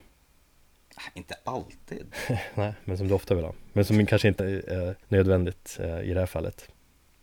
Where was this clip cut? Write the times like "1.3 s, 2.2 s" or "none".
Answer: 2.1 s, 4.4 s, 5.0 s